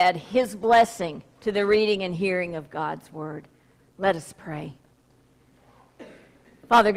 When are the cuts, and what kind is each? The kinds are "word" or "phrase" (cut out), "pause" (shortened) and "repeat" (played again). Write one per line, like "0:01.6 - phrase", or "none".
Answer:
0:01.3 - pause